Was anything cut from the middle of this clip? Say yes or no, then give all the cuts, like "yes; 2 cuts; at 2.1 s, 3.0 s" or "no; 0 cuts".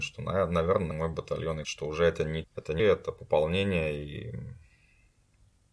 yes; 4 cuts; at 0.9 s, 1.6 s, 2.4 s, 2.8 s